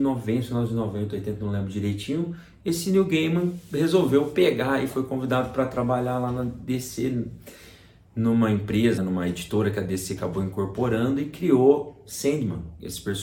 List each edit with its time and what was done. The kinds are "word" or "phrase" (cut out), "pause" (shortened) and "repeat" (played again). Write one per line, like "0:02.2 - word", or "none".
0:09.0 - word